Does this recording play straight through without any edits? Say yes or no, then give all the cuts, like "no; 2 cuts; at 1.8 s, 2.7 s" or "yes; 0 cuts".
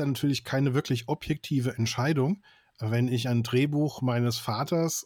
yes; 0 cuts